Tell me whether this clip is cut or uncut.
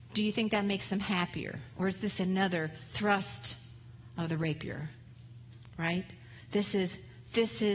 uncut